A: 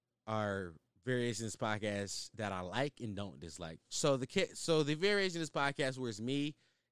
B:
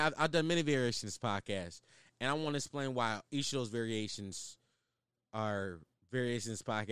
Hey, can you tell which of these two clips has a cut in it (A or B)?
A